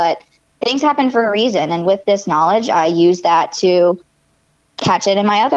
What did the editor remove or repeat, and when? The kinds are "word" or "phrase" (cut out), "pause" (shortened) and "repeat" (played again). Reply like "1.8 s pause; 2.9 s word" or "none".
none